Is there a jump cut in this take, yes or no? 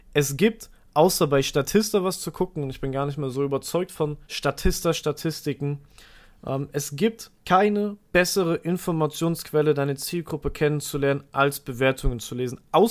yes